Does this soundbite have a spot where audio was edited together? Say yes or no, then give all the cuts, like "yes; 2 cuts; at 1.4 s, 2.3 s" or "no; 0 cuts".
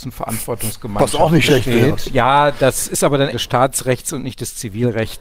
yes; 1 cut; at 3.3 s